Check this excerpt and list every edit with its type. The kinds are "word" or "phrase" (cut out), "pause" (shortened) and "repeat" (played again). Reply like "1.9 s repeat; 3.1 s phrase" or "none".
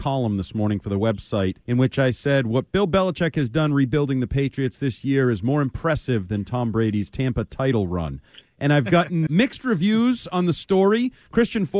1.6 s pause; 9.3 s word